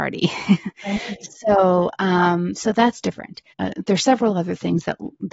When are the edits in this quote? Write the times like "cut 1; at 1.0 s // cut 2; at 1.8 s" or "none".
cut 1; at 3.5 s